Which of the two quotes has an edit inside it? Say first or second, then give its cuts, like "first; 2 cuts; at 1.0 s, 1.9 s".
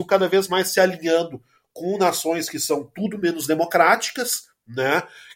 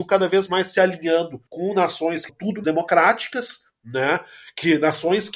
second; 3 cuts; at 1.5 s, 2.3 s, 2.6 s